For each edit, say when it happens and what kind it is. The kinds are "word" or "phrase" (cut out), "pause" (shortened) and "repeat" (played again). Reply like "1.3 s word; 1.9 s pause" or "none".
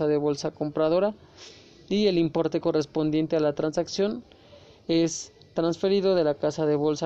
none